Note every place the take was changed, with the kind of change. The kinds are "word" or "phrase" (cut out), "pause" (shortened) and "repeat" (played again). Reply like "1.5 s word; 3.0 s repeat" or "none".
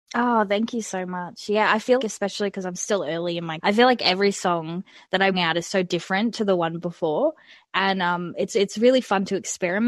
2.0 s word; 3.6 s word; 5.3 s word